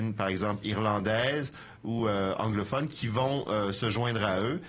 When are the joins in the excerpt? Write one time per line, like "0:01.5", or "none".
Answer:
none